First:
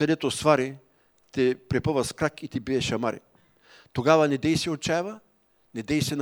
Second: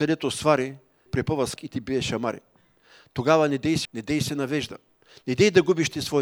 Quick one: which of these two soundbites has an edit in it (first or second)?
second